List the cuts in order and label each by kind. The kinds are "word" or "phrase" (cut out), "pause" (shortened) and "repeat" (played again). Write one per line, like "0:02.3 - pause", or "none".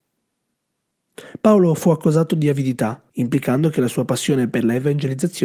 0:03.1 - pause